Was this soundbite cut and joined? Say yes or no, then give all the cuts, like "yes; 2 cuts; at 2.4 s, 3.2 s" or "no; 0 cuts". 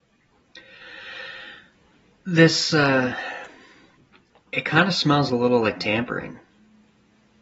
no; 0 cuts